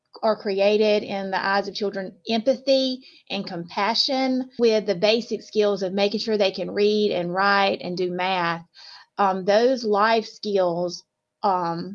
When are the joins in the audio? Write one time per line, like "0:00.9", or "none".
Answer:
0:04.6